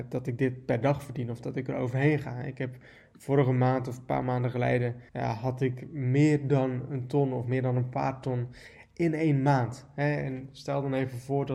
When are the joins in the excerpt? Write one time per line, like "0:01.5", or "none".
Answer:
0:05.1